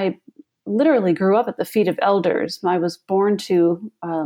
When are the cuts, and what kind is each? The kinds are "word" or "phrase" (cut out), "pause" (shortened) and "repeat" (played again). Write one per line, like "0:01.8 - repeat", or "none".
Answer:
none